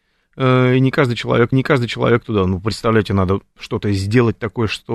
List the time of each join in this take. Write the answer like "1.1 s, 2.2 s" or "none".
1.5 s